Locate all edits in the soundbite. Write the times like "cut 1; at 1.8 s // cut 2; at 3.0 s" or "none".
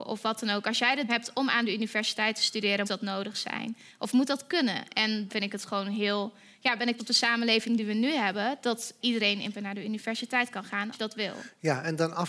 cut 1; at 1.1 s // cut 2; at 2.8 s // cut 3; at 5.3 s // cut 4; at 7.0 s // cut 5; at 9.0 s // cut 6; at 9.5 s // cut 7; at 10.9 s